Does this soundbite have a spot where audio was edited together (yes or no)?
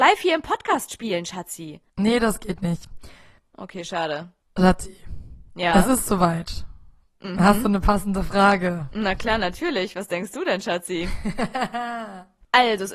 no